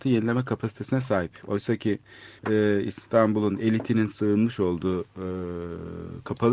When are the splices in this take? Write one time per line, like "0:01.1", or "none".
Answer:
0:02.4